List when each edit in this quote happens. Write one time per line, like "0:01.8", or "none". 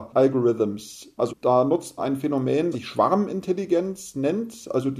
0:01.3
0:02.0
0:02.7